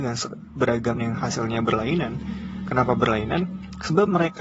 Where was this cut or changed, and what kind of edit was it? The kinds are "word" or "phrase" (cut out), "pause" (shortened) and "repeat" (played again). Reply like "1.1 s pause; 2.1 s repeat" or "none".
1.0 s word

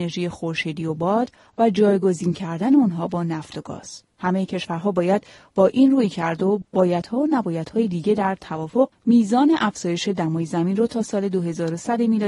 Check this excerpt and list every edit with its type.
none

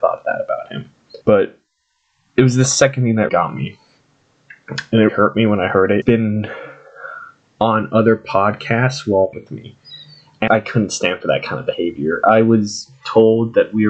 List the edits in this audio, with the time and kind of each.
1.2 s pause; 3.3 s word; 5.1 s word; 6.0 s phrase; 9.3 s word; 10.5 s word

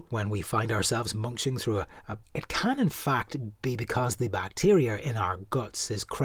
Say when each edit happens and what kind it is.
2.2 s phrase

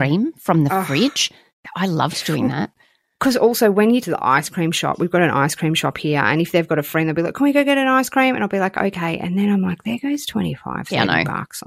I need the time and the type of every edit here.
4.0 s phrase

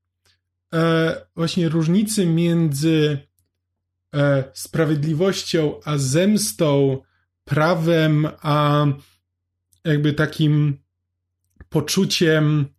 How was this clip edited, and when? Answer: none

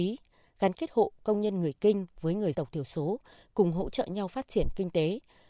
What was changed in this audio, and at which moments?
2.5 s word

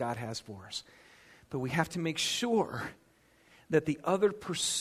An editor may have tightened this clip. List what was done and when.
none

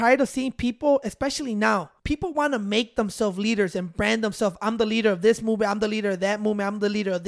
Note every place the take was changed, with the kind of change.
2.0 s pause

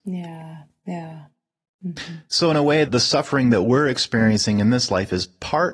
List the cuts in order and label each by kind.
2.9 s word

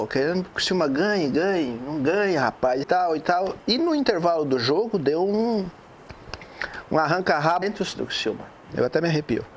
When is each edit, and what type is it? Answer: 2.8 s word; 7.6 s word; 7.9 s word

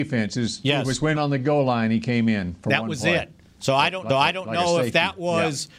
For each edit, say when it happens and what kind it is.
1.2 s phrase; 4.1 s repeat

